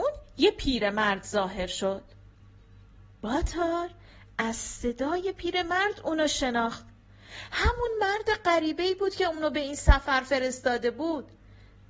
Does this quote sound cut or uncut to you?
uncut